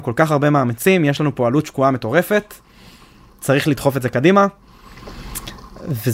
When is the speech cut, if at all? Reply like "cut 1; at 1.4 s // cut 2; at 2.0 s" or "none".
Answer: none